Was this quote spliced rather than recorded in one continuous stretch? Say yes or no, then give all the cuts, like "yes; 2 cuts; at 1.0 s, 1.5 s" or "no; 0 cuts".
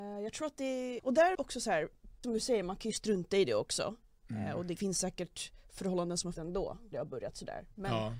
yes; 6 cuts; at 1.0 s, 1.3 s, 2.2 s, 4.8 s, 6.3 s, 6.9 s